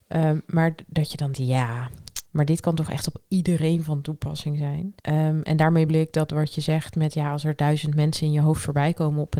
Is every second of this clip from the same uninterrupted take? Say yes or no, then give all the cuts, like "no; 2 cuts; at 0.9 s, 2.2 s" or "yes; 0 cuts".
no; 4 cuts; at 1.3 s, 2.3 s, 5.0 s, 5.9 s